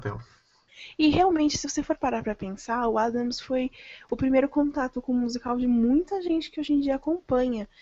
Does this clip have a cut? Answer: no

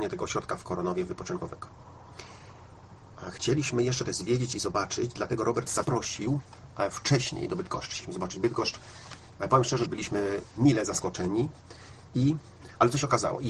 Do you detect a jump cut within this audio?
yes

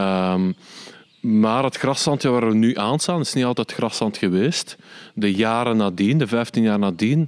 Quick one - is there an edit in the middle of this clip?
no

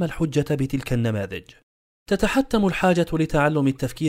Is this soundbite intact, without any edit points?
yes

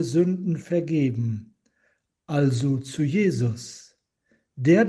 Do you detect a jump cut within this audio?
no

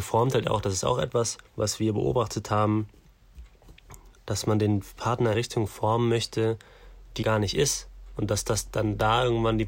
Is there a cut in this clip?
yes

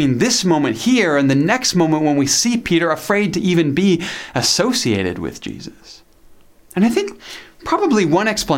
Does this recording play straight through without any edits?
no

